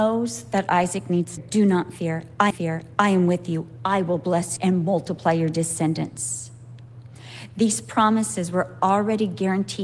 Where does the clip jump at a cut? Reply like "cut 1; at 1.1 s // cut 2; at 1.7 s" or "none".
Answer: cut 1; at 1.4 s // cut 2; at 2.5 s // cut 3; at 4.6 s

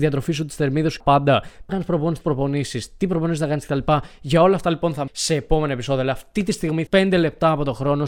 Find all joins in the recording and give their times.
cut 1; at 1.0 s // cut 2; at 1.7 s // cut 3; at 2.2 s // cut 4; at 5.1 s // cut 5; at 6.9 s

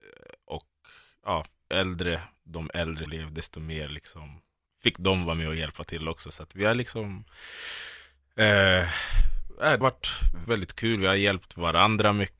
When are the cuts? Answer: cut 1; at 1.7 s // cut 2; at 3.1 s // cut 3; at 9.8 s // cut 4; at 10.4 s

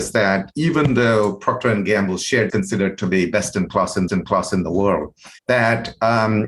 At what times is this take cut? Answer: cut 1; at 2.5 s // cut 2; at 4.1 s // cut 3; at 5.4 s

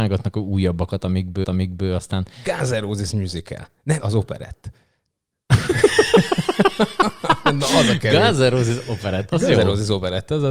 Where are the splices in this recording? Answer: cut 1; at 1.4 s // cut 2; at 4.0 s

